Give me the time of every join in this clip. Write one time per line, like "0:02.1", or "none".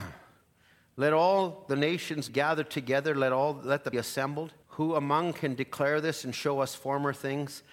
0:02.3
0:03.9
0:04.6

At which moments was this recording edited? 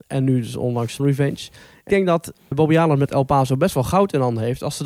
0:01.0
0:01.9
0:02.5

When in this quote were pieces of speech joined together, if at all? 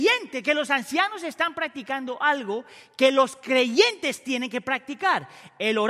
none

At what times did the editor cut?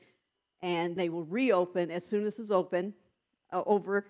0:01.0
0:02.3

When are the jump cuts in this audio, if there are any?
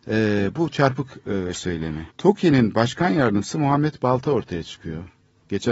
0:01.5
0:02.1

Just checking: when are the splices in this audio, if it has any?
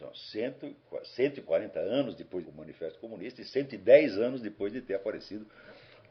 0:02.4

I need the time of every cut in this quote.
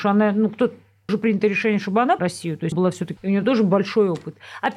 0:01.1
0:02.2
0:02.7
0:03.2

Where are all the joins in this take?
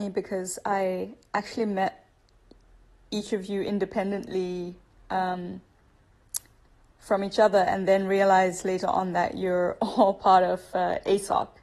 none

